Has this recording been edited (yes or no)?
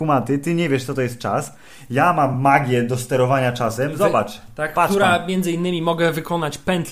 no